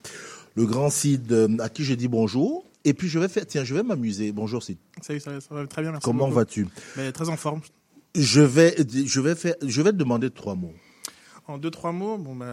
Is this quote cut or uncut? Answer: cut